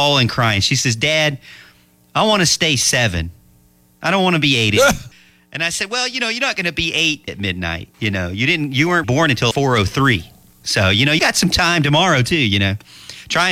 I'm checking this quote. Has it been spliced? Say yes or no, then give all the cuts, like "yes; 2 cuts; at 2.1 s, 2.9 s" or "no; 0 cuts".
yes; 6 cuts; at 5.1 s, 7.3 s, 7.9 s, 9.0 s, 9.5 s, 11.2 s